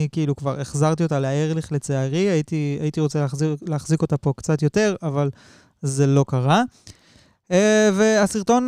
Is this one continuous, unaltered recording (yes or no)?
yes